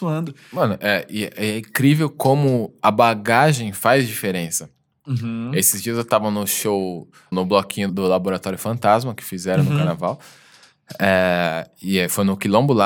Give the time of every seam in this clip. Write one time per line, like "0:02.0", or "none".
0:07.3
0:07.9